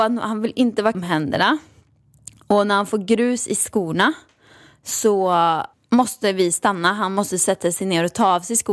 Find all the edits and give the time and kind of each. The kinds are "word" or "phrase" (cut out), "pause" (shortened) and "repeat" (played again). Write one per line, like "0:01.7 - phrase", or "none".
0:00.9 - word
0:05.7 - pause